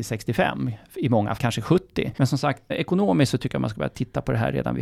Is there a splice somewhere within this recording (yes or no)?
yes